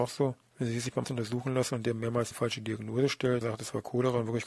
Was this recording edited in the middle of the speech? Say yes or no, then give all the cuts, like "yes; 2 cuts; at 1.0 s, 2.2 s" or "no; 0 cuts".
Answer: yes; 3 cuts; at 1.0 s, 2.3 s, 3.4 s